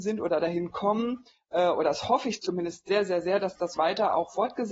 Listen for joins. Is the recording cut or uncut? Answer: uncut